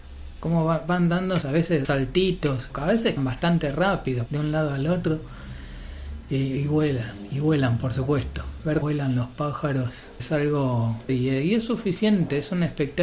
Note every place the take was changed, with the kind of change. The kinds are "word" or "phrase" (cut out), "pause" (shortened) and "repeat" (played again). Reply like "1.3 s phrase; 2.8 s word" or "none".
1.4 s word; 1.8 s word; 2.7 s word; 3.2 s word; 4.3 s word; 8.8 s word; 10.2 s word; 11.1 s word